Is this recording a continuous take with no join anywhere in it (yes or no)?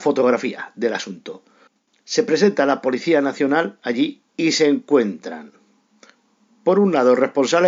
no